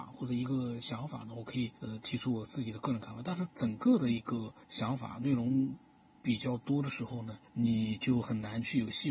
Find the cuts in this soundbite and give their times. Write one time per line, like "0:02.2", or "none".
0:01.8
0:04.6
0:07.5